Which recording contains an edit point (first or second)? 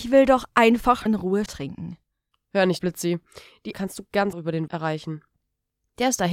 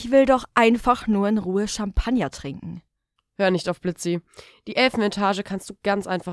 first